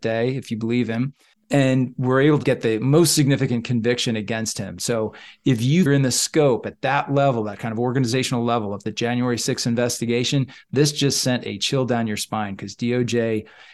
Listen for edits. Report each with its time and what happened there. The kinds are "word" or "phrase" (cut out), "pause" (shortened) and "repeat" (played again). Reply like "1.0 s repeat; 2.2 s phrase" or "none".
1.3 s pause; 5.9 s phrase